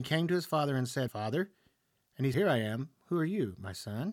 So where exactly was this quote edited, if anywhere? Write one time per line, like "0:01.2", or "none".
0:01.1
0:02.3